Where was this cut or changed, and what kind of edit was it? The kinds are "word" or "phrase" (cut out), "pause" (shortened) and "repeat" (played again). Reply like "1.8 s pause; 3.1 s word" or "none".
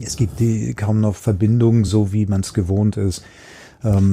none